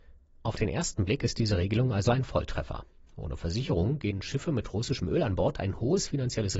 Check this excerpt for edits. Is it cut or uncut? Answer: uncut